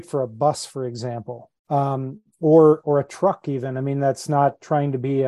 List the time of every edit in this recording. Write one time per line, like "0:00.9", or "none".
0:01.6